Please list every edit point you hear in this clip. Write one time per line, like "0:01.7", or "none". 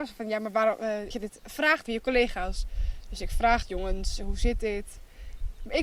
0:01.1
0:01.9
0:03.6